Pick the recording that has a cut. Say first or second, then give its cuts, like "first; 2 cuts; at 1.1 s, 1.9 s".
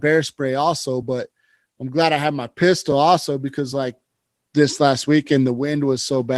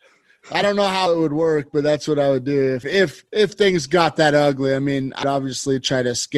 second; 4 cuts; at 1.1 s, 2.8 s, 3.3 s, 5.2 s